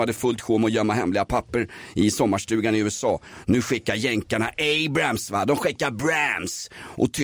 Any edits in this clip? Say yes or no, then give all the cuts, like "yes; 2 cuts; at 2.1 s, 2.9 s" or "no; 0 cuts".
no; 0 cuts